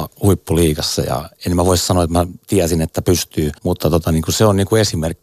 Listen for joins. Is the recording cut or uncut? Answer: cut